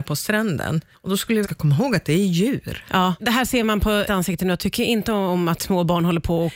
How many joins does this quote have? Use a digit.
4